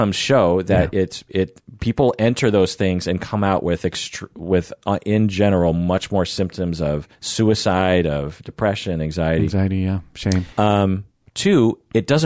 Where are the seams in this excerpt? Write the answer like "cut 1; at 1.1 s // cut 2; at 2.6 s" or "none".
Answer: cut 1; at 7.1 s // cut 2; at 10.5 s